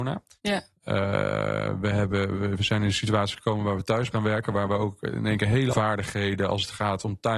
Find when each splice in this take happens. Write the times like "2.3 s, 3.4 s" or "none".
4.1 s, 5.7 s